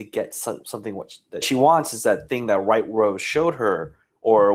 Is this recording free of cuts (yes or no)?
no